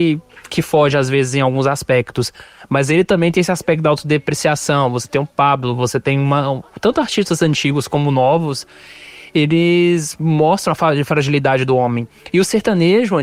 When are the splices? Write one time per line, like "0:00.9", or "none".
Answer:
none